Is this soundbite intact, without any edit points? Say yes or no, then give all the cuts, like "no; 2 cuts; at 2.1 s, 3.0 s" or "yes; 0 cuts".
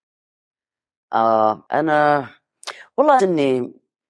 no; 2 cuts; at 1.6 s, 3.2 s